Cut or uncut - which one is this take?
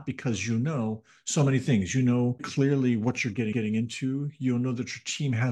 cut